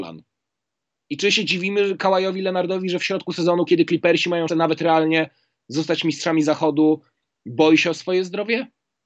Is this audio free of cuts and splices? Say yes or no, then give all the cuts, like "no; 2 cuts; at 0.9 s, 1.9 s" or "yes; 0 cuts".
no; 1 cut; at 4.5 s